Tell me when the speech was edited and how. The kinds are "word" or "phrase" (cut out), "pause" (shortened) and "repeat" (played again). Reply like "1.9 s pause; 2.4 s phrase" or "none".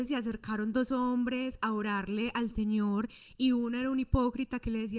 none